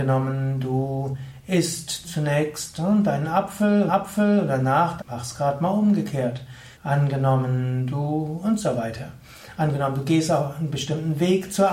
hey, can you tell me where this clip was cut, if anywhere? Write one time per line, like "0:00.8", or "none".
0:02.0
0:03.9
0:05.0
0:06.7